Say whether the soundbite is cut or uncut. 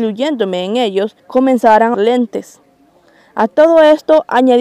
cut